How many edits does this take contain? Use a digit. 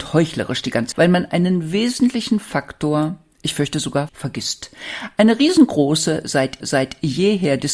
3